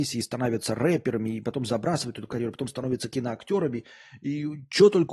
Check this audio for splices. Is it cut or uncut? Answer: uncut